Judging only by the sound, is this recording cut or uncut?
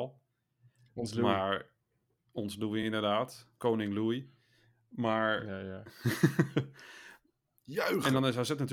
uncut